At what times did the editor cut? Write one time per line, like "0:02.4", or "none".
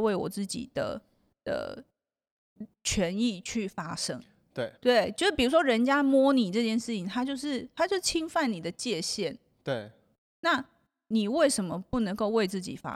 0:04.8

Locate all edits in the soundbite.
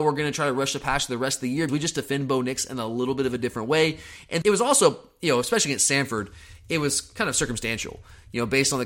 0:01.7
0:04.4

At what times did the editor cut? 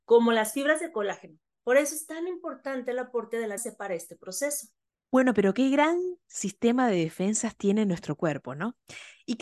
0:03.6
0:04.9

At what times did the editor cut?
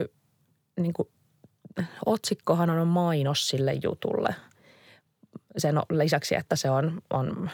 none

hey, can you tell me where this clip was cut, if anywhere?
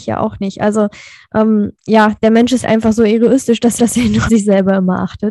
0:01.8
0:02.6
0:03.8
0:04.3

